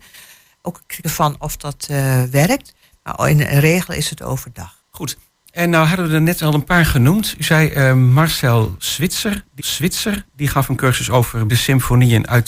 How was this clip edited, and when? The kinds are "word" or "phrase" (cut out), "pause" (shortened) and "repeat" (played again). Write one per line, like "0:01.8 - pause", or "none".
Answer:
0:01.0 - word
0:04.8 - pause
0:09.6 - repeat
0:11.5 - word